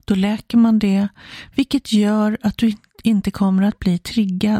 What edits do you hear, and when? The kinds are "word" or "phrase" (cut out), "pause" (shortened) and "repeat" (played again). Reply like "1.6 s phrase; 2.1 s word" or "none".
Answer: none